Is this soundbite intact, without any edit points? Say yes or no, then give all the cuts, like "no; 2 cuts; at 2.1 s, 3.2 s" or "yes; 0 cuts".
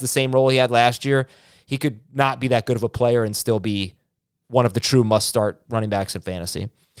yes; 0 cuts